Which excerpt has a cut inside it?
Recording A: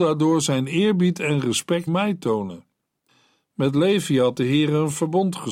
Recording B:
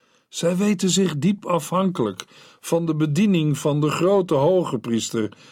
A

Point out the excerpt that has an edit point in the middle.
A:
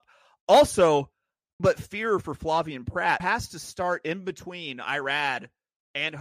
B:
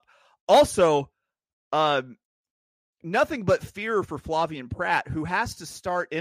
A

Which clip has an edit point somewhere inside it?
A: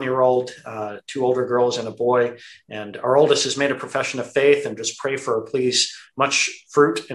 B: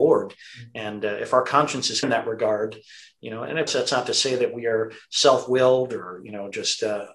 B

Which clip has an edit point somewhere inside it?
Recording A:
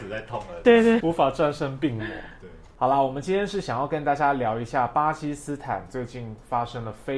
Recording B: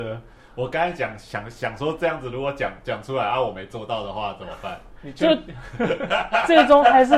A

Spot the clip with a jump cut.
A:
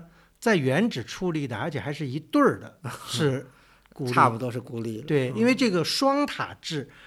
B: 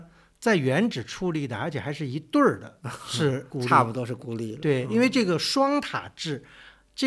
B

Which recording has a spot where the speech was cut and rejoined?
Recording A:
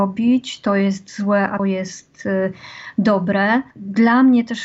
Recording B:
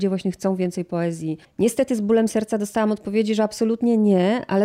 A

